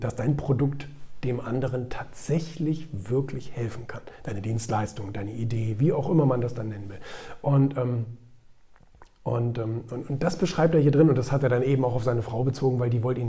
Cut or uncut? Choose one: uncut